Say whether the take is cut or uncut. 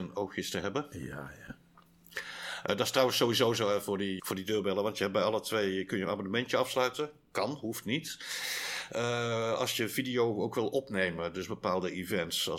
cut